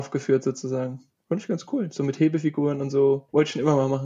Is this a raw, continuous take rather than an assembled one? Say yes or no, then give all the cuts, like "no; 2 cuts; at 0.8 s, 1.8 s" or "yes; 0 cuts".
yes; 0 cuts